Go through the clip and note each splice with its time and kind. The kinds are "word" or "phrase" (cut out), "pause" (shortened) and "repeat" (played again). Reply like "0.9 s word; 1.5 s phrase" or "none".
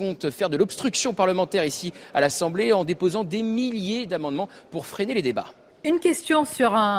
5.7 s pause